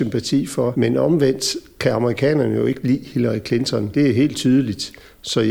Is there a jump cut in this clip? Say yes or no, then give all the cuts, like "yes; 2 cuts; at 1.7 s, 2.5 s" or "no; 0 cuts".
no; 0 cuts